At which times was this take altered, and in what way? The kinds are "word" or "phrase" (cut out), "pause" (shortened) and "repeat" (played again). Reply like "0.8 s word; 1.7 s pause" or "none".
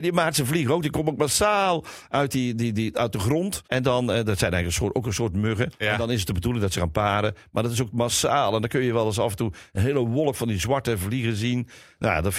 3.6 s pause; 5.7 s pause